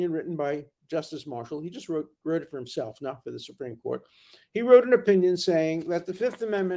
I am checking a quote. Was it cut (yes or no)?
no